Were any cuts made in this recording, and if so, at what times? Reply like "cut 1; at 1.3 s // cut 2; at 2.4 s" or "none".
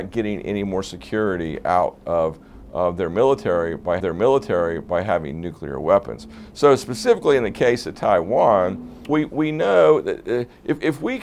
cut 1; at 4.0 s // cut 2; at 9.1 s